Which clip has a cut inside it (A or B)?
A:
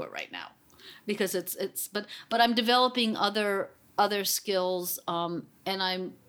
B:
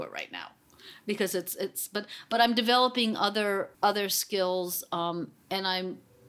B